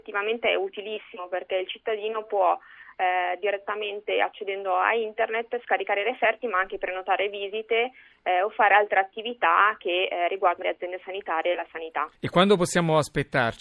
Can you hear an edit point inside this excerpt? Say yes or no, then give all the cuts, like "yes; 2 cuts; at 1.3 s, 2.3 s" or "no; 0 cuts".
yes; 2 cuts; at 10.6 s, 12.2 s